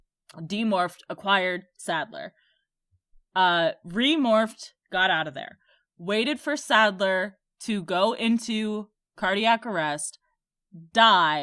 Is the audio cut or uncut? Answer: uncut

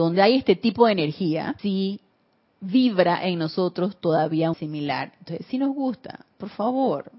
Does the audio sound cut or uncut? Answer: cut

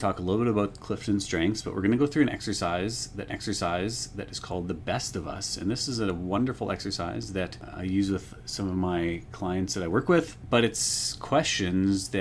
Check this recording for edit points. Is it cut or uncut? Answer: cut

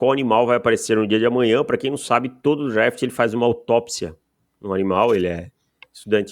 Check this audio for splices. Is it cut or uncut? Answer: uncut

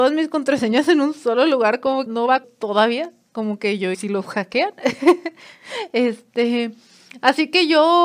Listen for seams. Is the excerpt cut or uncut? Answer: cut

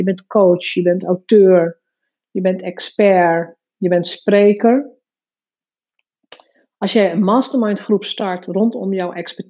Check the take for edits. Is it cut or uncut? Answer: uncut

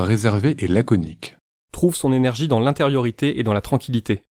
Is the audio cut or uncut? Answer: uncut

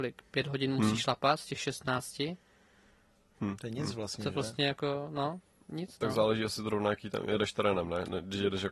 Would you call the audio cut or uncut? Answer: uncut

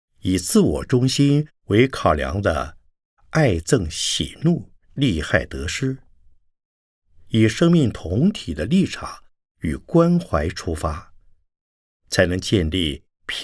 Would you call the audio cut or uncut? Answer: cut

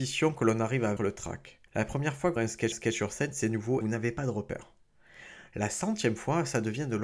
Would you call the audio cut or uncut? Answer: cut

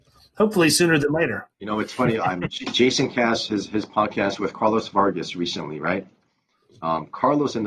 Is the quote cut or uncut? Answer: cut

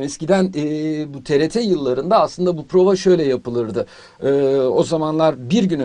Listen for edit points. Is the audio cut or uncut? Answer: uncut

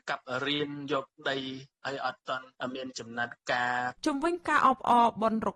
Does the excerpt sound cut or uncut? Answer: cut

